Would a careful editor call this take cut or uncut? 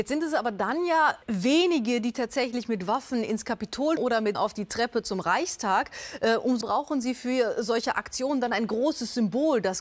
cut